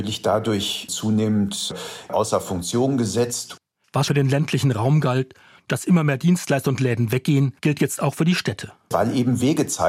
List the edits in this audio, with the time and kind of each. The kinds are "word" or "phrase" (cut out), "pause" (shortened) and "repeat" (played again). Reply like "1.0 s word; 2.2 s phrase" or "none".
4.1 s word; 7.6 s pause